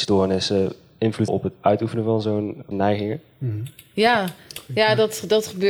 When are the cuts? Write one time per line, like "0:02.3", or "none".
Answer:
0:01.3
0:02.7